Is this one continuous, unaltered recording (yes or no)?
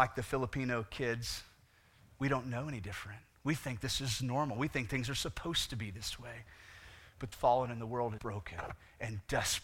no